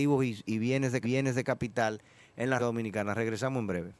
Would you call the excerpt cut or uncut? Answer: cut